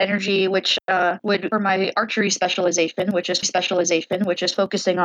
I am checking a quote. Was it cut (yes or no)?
yes